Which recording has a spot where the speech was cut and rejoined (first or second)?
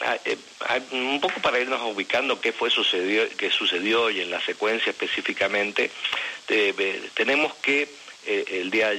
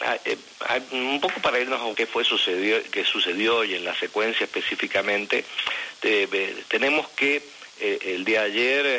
second